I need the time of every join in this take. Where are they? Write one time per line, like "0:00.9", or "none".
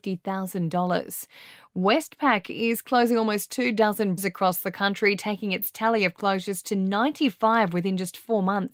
0:04.2